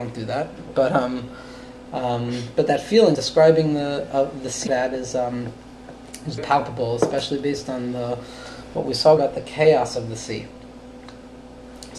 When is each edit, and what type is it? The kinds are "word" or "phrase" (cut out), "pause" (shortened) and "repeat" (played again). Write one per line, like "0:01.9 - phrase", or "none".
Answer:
0:03.1 - word
0:04.7 - word
0:06.4 - word
0:09.2 - word